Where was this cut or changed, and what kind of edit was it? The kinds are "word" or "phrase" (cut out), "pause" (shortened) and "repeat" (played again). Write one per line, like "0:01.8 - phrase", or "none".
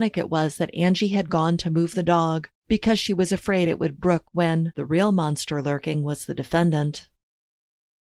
0:02.6 - pause
0:04.0 - word